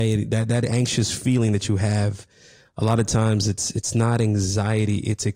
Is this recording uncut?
yes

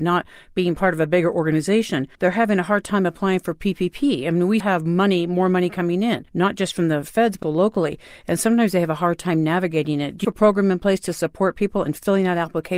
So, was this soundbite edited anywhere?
yes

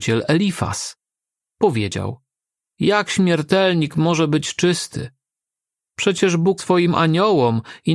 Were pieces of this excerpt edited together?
yes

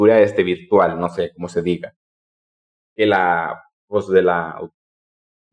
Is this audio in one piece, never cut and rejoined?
yes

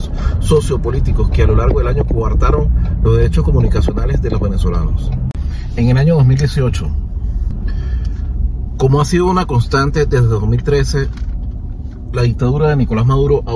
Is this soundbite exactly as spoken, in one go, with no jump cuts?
yes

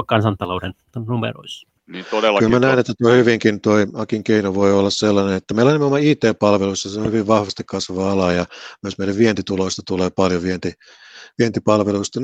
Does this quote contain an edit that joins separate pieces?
yes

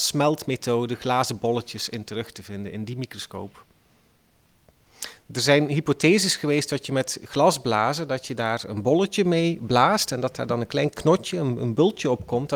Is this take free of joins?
yes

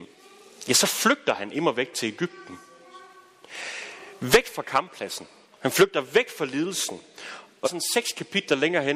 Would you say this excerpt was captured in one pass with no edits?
no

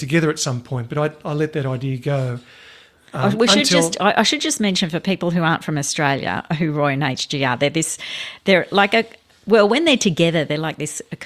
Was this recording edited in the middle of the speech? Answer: no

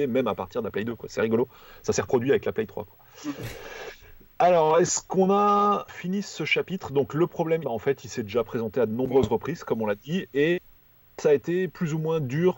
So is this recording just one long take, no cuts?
no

